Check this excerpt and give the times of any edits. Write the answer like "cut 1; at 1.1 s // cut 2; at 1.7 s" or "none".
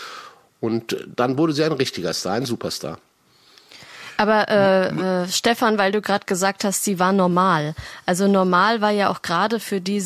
none